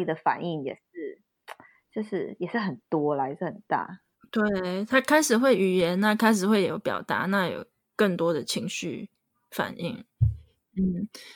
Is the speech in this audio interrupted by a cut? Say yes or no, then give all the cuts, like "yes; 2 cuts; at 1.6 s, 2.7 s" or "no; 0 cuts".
no; 0 cuts